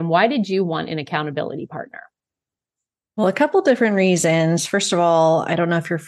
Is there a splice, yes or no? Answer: no